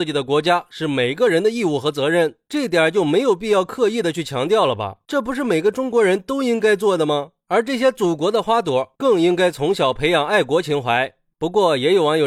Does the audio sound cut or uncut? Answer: uncut